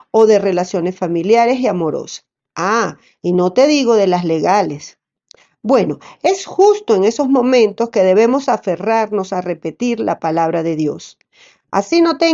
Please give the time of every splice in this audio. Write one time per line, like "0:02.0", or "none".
none